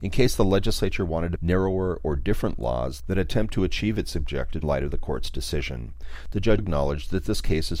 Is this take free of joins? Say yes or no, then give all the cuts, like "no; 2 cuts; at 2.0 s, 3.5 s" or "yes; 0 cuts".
no; 3 cuts; at 1.4 s, 4.6 s, 6.6 s